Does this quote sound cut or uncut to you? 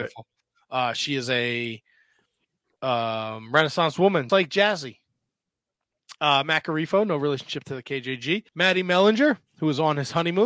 cut